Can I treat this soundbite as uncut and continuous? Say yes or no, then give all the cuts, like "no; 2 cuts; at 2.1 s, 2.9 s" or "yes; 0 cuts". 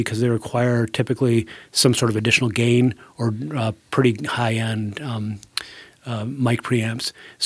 yes; 0 cuts